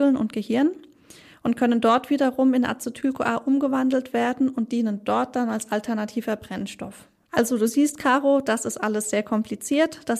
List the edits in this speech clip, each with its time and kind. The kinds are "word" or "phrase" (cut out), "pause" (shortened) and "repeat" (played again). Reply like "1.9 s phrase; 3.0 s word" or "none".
none